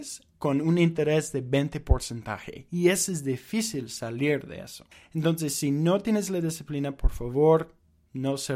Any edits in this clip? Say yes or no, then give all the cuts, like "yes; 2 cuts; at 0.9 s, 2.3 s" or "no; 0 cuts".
yes; 1 cut; at 4.9 s